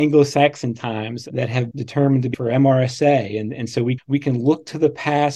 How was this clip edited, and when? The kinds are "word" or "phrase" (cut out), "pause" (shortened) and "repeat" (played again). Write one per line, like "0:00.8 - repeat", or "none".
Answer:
0:01.7 - word
0:02.3 - word
0:04.0 - word